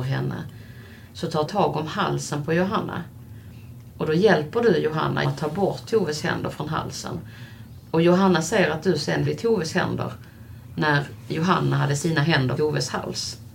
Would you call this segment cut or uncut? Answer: cut